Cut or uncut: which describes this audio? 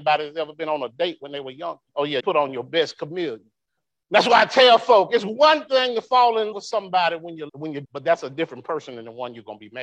cut